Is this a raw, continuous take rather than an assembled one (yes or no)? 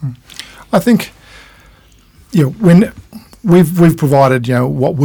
yes